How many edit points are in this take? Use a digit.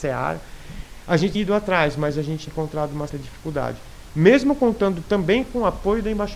3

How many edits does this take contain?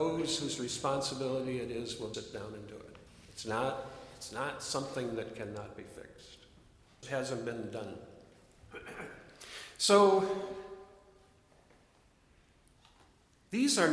3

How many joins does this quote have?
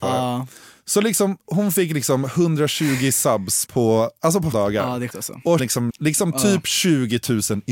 6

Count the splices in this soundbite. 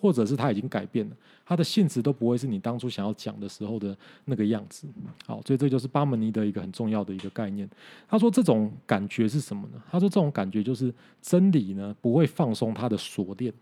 0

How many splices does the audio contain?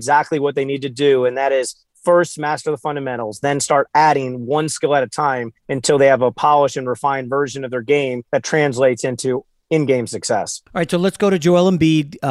3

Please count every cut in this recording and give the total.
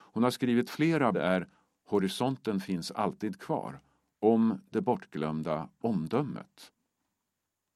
1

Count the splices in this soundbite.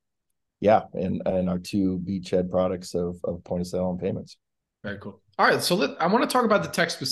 0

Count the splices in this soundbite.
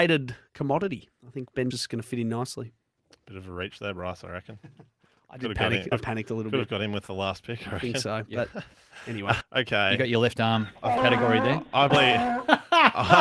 4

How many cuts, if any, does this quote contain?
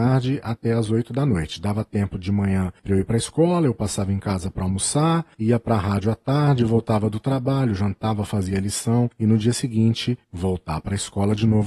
1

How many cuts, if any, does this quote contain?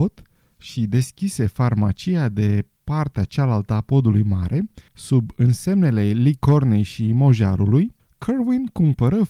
2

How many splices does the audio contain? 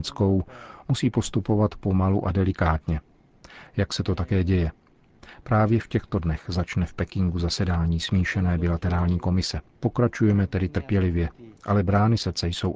1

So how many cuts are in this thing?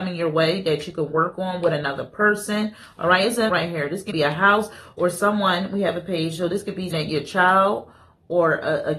3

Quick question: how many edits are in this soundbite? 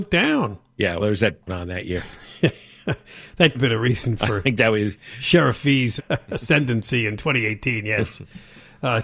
4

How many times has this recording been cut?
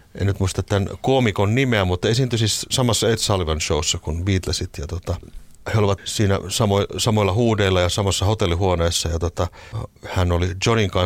0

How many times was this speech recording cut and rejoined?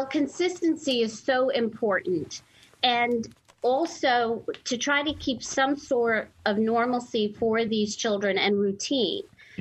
0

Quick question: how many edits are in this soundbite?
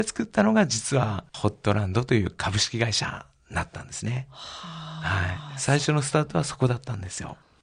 1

